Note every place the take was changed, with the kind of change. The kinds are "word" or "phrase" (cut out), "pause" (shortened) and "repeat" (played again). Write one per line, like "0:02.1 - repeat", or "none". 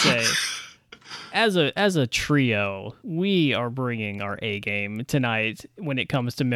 0:03.0 - pause